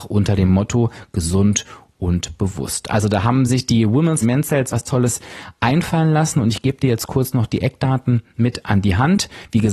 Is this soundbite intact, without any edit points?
no; 2 cuts; at 4.2 s, 4.7 s

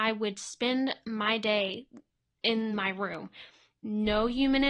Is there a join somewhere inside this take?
no; 0 cuts

